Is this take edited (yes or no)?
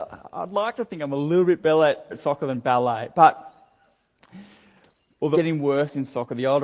yes